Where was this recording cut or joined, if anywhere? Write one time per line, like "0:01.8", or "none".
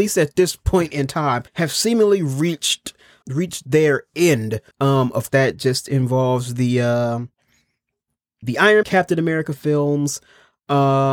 0:01.5
0:03.2
0:04.7
0:05.3
0:08.4
0:08.8